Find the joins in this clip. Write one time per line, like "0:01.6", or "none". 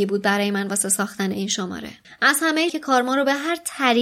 0:02.0
0:02.7